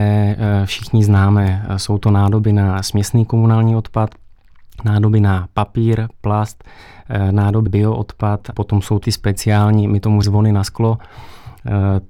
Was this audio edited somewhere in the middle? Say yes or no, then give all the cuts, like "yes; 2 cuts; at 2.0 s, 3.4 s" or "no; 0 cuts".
yes; 4 cuts; at 7.7 s, 8.5 s, 9.0 s, 10.2 s